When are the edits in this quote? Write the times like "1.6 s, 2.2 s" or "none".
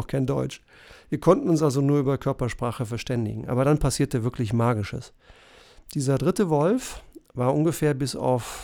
none